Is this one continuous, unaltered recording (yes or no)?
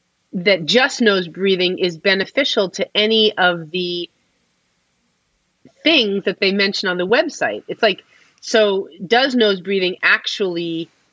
yes